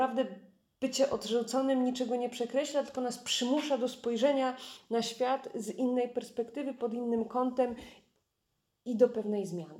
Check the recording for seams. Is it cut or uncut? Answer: uncut